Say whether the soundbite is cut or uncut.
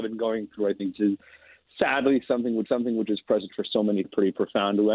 cut